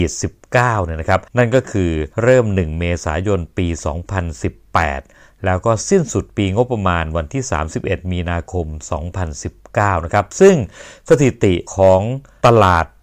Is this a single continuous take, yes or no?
no